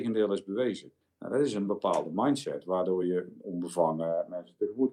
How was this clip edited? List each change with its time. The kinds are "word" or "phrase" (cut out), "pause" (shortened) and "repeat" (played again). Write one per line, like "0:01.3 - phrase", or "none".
none